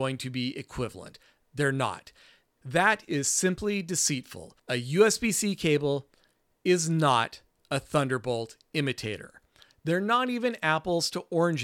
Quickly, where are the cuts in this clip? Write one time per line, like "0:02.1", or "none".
none

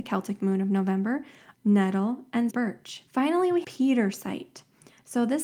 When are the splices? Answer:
0:01.5
0:02.5
0:03.1
0:03.6

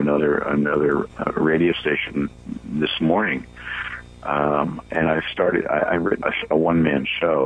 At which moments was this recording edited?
0:01.1
0:02.3
0:04.9
0:06.2

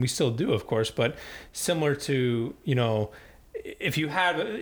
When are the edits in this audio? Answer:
none

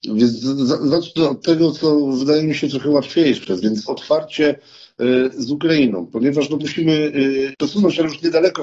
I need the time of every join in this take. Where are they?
0:03.9
0:06.6
0:07.5

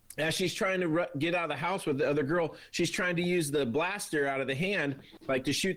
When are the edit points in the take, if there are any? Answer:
none

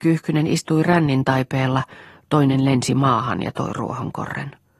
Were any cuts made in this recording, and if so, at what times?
none

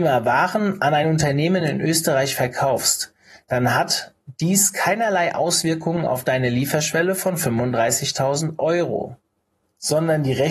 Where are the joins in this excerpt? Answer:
none

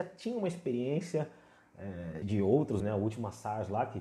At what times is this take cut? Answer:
0:02.2
0:02.8

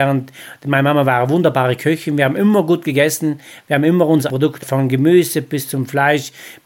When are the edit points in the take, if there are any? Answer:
0:04.3
0:04.6

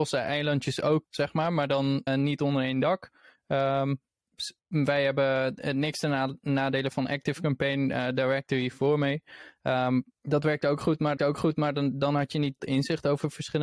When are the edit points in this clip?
0:01.0
0:02.1
0:04.6
0:10.1
0:11.2
0:12.6

